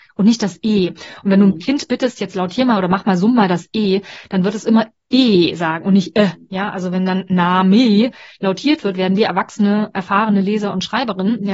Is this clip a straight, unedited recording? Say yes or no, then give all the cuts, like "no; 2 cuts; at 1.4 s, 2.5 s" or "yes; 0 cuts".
yes; 0 cuts